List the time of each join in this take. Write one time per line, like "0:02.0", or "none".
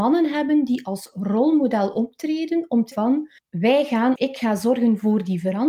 0:02.9
0:03.4
0:04.2